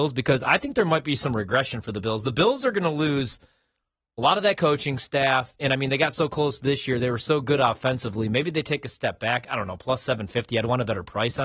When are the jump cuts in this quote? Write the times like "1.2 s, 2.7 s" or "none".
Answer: none